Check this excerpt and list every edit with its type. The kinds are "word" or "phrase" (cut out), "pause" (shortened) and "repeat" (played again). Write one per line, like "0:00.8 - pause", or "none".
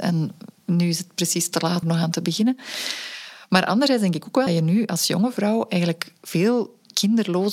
0:01.8 - phrase
0:04.5 - word